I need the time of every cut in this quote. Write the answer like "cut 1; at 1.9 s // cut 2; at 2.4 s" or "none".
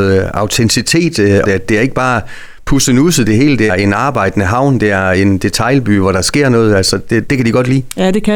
cut 1; at 1.4 s // cut 2; at 3.7 s // cut 3; at 7.3 s